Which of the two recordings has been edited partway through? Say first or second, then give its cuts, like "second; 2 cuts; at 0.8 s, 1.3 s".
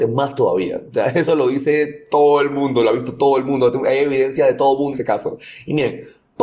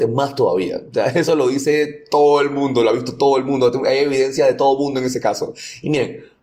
first; 1 cut; at 4.9 s